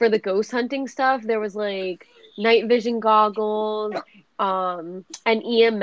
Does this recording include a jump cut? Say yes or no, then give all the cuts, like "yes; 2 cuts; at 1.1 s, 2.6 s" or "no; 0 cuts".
no; 0 cuts